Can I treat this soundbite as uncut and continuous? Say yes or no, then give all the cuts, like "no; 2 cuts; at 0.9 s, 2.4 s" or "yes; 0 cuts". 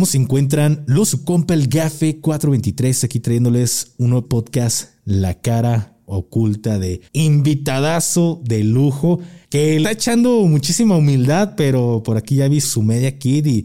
no; 6 cuts; at 1.1 s, 4.2 s, 7.1 s, 9.4 s, 9.8 s, 12.6 s